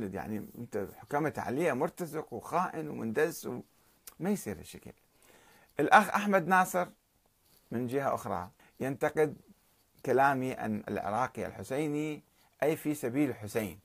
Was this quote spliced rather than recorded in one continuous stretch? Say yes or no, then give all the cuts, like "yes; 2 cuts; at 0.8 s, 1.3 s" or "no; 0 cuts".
yes; 2 cuts; at 8.6 s, 10.8 s